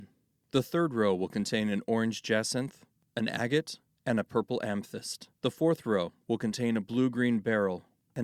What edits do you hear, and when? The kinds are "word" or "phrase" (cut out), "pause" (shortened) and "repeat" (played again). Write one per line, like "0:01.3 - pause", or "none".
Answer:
0:05.3 - pause